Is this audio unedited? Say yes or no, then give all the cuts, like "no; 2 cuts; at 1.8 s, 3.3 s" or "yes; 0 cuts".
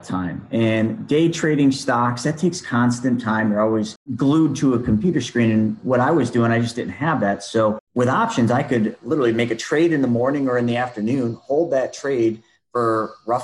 no; 1 cut; at 4.0 s